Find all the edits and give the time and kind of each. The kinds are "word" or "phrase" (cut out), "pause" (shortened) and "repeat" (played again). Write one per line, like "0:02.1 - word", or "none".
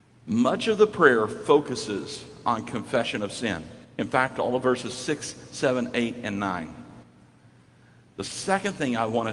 none